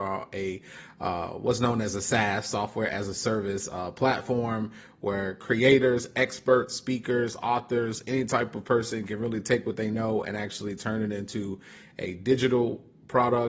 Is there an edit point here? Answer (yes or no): no